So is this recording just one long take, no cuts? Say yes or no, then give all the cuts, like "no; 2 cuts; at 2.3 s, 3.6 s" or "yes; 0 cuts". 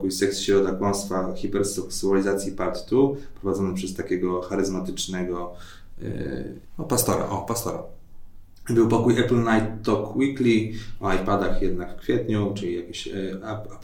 yes; 0 cuts